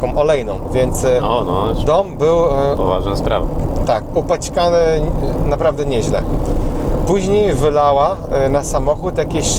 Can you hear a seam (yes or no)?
no